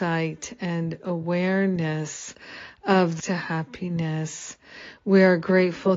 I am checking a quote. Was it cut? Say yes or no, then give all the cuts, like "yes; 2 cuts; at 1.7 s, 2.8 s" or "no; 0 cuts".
yes; 1 cut; at 3.2 s